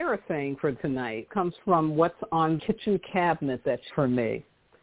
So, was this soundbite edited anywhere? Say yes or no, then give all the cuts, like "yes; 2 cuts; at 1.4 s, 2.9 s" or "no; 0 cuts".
yes; 3 cuts; at 1.3 s, 2.6 s, 3.9 s